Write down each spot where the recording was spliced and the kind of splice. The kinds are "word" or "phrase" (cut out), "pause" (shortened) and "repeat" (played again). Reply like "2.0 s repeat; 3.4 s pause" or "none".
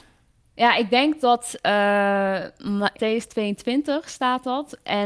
1.2 s word; 2.9 s word